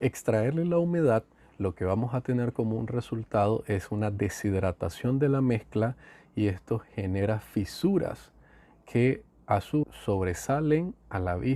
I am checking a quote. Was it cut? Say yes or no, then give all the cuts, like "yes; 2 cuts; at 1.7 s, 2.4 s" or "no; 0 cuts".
yes; 1 cut; at 9.8 s